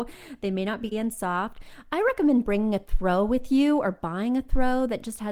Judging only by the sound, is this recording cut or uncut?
cut